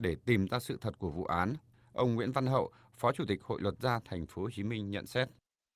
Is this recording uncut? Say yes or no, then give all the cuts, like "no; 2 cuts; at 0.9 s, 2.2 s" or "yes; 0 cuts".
yes; 0 cuts